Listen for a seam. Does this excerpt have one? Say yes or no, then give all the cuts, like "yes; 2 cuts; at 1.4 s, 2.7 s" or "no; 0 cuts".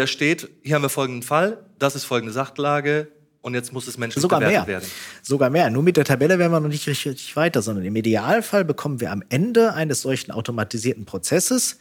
no; 0 cuts